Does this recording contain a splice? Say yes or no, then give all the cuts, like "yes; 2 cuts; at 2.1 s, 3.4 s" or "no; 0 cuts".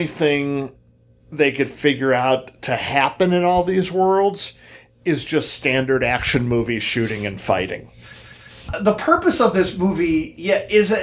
no; 0 cuts